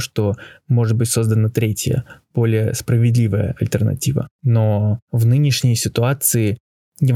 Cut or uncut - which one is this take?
cut